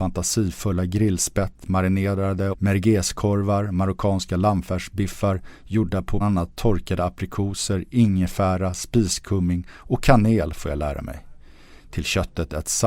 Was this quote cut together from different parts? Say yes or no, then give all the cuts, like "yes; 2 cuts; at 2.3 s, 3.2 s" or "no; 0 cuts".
yes; 2 cuts; at 2.5 s, 6.2 s